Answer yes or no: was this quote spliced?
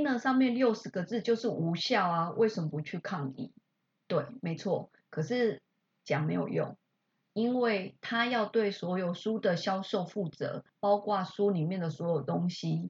yes